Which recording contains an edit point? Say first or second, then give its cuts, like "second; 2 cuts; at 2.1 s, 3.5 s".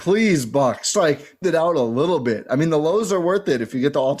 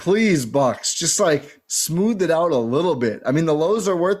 first; 2 cuts; at 0.9 s, 1.4 s